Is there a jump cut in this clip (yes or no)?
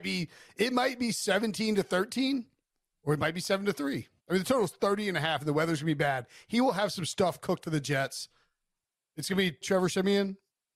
yes